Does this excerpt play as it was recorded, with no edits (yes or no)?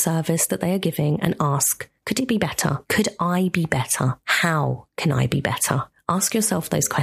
yes